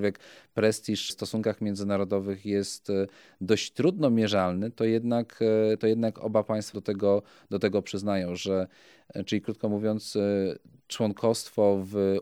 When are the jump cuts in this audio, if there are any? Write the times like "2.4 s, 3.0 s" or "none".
1.1 s, 5.8 s, 6.7 s